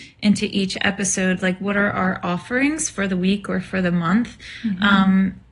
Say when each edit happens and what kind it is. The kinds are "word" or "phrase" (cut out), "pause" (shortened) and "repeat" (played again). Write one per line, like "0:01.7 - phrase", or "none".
none